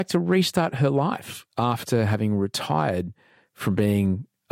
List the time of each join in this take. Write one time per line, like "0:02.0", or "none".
none